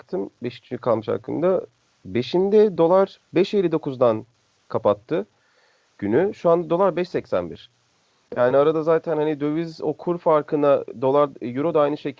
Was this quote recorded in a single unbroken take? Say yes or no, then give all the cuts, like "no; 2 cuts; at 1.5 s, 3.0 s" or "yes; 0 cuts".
yes; 0 cuts